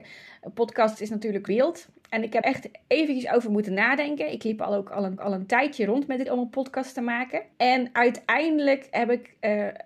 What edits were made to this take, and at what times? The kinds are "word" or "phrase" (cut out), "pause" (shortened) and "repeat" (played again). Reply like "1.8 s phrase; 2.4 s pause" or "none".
1.5 s word; 2.4 s word; 5.2 s repeat; 6.3 s word; 7.5 s pause